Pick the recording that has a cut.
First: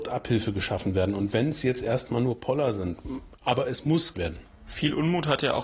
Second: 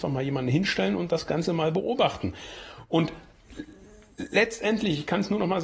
first; 1 cut; at 4.1 s

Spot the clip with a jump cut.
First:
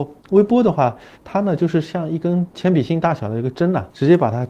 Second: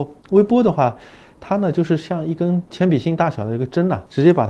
first; 1 cut; at 1.1 s

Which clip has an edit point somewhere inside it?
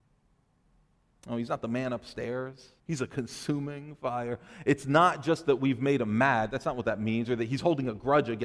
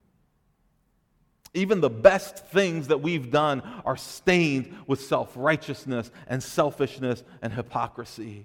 first; 1 cut; at 2.8 s

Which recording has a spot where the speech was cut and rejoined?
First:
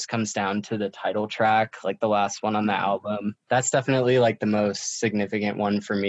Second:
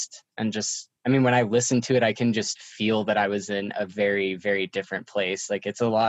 second; 1 cut; at 1.0 s

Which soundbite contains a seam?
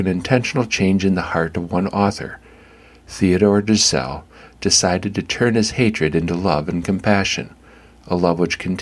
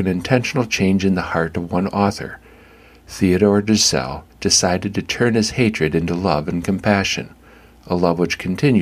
second; 1 cut; at 4.3 s

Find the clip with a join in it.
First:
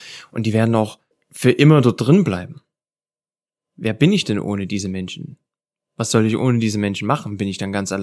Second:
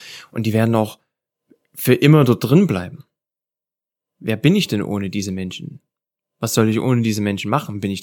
first; 1 cut; at 1.1 s

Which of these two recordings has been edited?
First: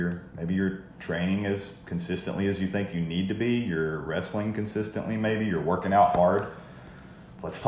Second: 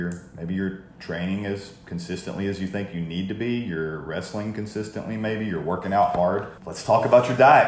second; 1 cut; at 6.6 s

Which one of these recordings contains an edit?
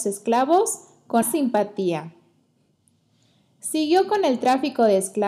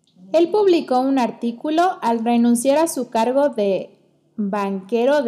first; 1 cut; at 1.2 s

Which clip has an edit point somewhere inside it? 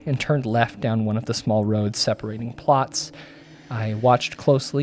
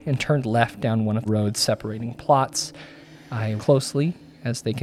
second; 2 cuts; at 1.3 s, 3.6 s

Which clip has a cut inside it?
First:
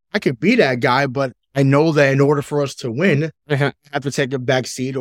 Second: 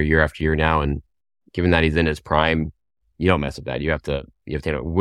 first; 1 cut; at 3.4 s

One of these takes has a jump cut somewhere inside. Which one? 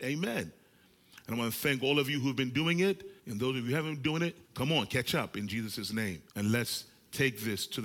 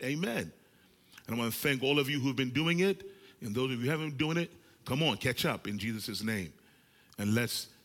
first; 3 cuts; at 3.2 s, 4.4 s, 6.3 s

